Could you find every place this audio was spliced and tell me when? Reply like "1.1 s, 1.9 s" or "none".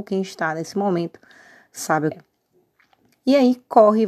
2.1 s